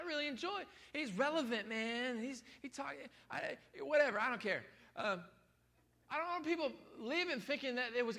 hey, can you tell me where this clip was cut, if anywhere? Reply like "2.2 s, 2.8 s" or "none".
none